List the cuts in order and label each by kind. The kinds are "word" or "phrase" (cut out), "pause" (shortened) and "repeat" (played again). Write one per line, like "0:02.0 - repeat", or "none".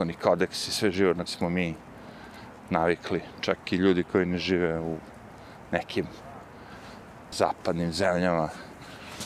0:01.3 - word
0:07.3 - word